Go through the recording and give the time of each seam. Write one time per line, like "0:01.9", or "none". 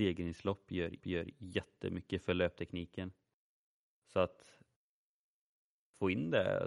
0:01.0